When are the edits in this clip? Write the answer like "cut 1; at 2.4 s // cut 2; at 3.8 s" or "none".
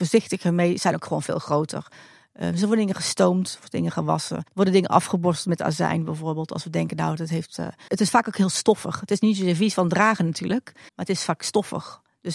cut 1; at 4.5 s // cut 2; at 7.9 s // cut 3; at 10.9 s